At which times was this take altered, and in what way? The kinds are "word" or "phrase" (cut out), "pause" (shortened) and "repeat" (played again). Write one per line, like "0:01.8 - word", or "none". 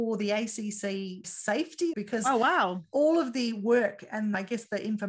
0:01.2 - word
0:01.9 - word